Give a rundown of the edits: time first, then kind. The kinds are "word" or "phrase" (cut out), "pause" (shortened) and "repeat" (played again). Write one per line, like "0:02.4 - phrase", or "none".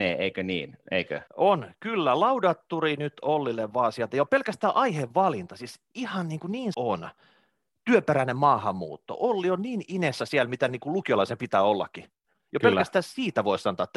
0:01.3 - pause
0:06.7 - word